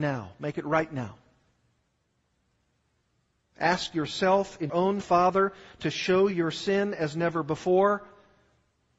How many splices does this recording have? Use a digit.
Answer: 3